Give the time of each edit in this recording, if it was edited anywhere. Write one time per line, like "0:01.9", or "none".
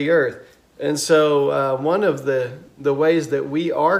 none